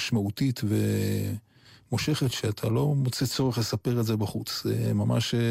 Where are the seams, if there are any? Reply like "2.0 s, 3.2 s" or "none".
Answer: none

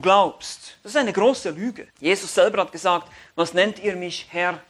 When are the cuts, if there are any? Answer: 1.9 s

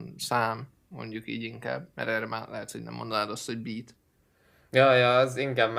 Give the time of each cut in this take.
none

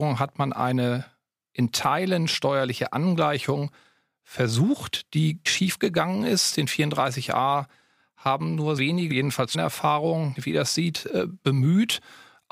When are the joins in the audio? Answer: 5.5 s, 8.8 s, 9.1 s, 9.5 s, 10.4 s

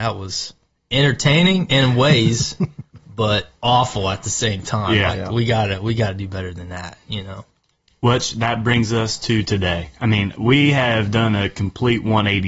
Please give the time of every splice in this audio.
none

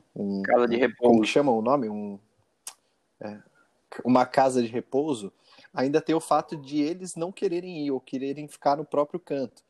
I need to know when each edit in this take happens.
none

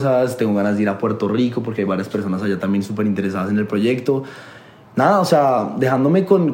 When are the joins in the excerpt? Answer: none

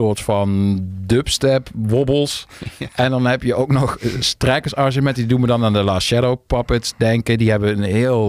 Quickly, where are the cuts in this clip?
none

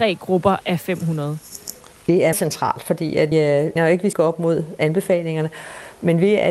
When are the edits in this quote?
2.3 s, 3.3 s, 3.8 s, 4.1 s

